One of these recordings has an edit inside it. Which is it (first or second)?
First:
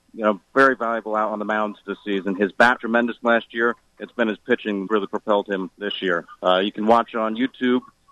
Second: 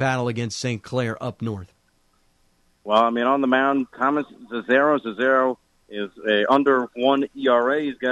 first